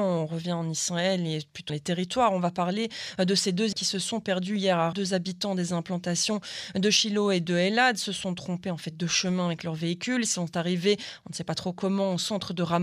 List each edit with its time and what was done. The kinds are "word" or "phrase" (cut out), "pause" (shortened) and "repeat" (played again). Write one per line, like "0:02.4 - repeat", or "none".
0:01.7 - word
0:03.7 - word
0:04.9 - word